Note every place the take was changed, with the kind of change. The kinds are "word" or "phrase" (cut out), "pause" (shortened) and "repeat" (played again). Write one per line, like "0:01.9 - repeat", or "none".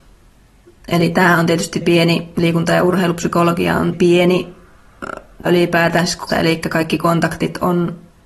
0:01.8 - word
0:03.9 - word
0:05.5 - word
0:06.3 - word